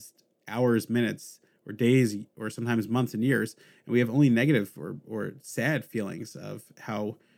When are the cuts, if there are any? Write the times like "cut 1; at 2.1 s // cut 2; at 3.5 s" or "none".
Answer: none